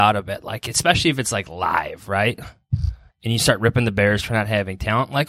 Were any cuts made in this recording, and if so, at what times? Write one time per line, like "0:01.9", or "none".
0:03.1